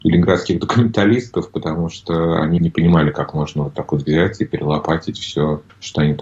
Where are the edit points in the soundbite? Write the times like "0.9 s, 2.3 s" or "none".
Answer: none